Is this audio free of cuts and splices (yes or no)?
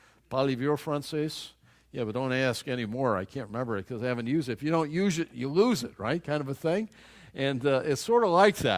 yes